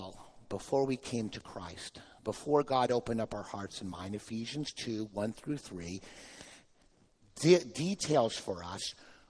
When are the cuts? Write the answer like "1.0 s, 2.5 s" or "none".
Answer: none